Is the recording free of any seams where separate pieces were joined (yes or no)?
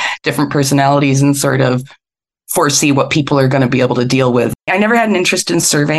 yes